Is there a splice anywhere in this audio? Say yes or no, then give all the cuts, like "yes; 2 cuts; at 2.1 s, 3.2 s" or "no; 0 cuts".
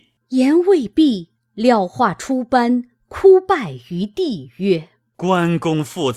no; 0 cuts